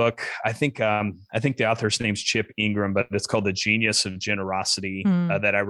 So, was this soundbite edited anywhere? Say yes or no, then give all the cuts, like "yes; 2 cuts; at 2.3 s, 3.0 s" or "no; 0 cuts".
no; 0 cuts